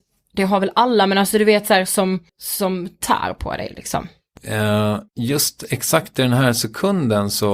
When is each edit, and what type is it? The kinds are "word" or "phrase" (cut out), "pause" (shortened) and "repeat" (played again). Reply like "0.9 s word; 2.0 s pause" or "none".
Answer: 2.3 s pause; 5.1 s pause